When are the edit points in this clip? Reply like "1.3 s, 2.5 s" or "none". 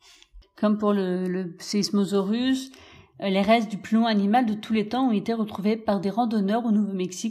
none